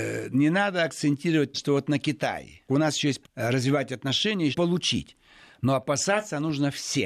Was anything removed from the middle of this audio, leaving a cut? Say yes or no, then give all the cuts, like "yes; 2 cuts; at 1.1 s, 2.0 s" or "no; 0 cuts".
yes; 4 cuts; at 1.5 s, 2.7 s, 3.2 s, 4.5 s